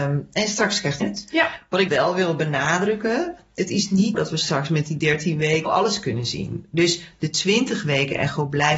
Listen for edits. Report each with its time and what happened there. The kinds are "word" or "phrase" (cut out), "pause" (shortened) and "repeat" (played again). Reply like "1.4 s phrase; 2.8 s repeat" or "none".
1.0 s word; 1.9 s word; 4.1 s word; 5.7 s word